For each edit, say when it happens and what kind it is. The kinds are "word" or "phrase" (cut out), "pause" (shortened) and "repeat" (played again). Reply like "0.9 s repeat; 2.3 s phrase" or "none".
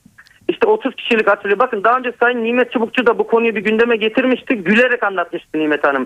none